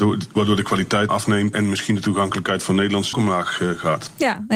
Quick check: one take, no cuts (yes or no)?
no